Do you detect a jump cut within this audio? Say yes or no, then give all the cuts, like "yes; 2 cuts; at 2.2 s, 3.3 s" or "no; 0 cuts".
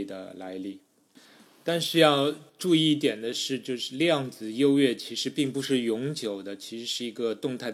yes; 1 cut; at 2.5 s